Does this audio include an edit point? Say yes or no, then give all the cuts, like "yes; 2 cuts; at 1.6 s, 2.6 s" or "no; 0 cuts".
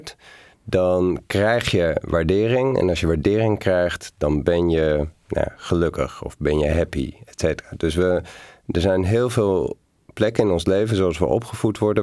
no; 0 cuts